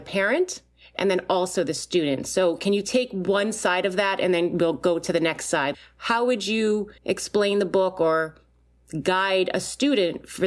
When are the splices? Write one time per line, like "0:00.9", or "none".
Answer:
0:07.0